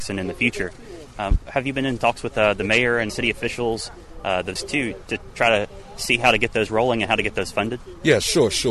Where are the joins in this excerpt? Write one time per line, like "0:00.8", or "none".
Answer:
0:03.1
0:04.6

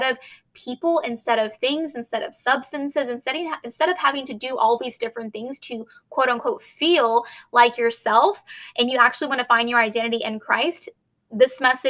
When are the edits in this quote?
none

